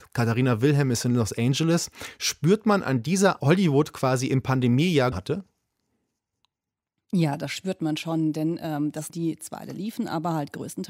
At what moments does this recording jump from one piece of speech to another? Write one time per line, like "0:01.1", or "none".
0:03.4
0:05.1
0:09.1